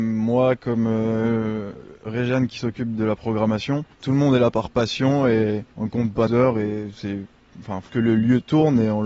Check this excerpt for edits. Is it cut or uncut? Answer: cut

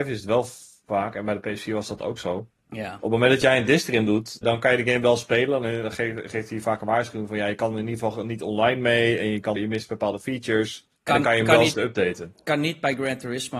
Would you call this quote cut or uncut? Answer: cut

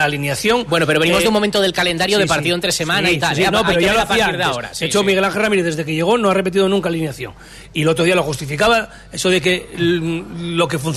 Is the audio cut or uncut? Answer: uncut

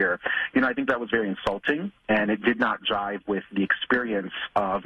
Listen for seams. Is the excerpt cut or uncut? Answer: uncut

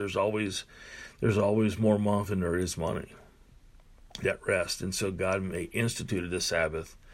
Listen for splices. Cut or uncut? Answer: cut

